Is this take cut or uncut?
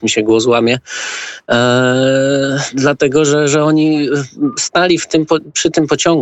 uncut